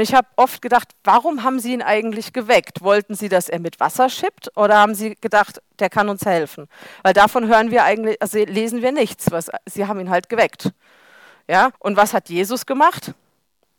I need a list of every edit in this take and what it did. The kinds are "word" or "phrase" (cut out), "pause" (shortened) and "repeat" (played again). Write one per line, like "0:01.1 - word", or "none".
0:11.7 - pause